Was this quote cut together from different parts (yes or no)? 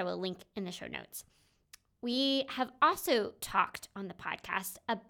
no